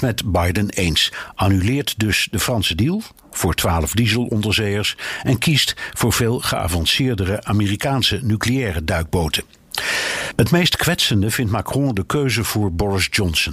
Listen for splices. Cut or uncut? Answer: uncut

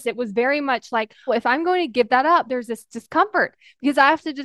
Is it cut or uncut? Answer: cut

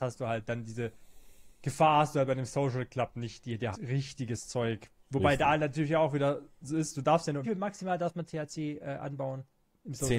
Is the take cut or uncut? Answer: cut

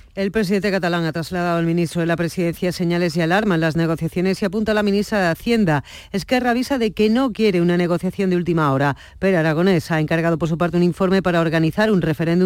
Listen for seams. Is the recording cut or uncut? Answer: uncut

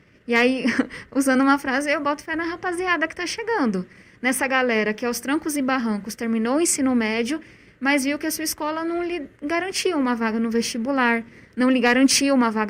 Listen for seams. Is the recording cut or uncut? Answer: uncut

